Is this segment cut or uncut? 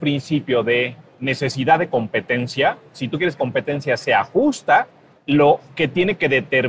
cut